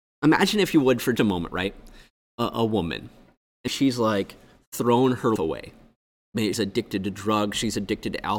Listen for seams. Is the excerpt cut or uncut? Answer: cut